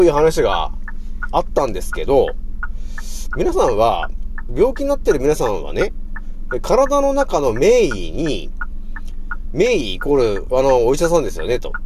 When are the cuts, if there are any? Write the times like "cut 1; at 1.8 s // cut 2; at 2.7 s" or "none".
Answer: cut 1; at 4.5 s // cut 2; at 10.5 s